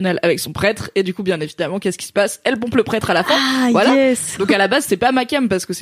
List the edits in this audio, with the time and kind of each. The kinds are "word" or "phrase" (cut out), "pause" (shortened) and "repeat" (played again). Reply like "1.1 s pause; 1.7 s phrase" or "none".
none